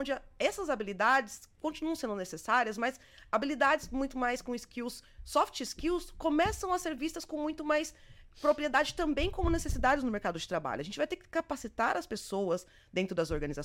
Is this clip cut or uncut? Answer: uncut